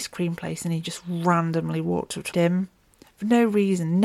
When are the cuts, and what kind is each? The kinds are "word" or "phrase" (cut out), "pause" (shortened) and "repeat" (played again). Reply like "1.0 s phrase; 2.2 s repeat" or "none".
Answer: 2.3 s phrase